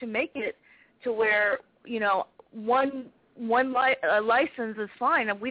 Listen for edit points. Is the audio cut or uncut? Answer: uncut